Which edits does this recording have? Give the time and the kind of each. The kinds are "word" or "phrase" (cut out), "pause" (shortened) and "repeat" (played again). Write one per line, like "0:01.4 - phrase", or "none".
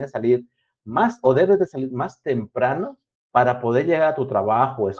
0:03.1 - pause